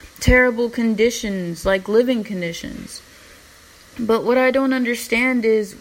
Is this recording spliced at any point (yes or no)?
no